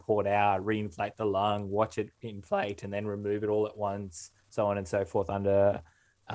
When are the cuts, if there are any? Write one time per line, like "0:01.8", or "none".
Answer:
0:04.4